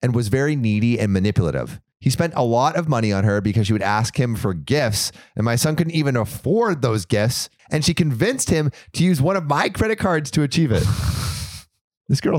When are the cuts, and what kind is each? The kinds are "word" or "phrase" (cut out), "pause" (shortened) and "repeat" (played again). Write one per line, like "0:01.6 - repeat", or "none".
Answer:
none